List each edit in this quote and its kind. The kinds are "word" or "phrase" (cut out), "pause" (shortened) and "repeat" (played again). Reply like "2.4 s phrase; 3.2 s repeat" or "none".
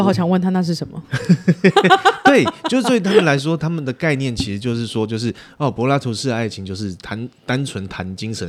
none